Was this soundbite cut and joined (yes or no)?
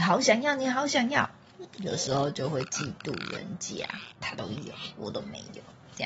yes